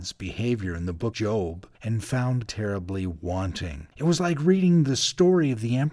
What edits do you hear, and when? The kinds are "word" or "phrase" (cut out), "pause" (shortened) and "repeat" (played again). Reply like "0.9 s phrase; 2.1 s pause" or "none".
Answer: 1.1 s word; 1.7 s pause; 2.5 s word; 3.9 s pause